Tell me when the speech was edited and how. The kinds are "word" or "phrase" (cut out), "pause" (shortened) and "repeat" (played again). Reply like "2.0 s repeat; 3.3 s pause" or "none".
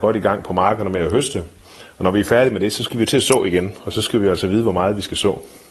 none